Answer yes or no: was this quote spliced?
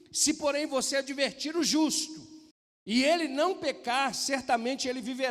yes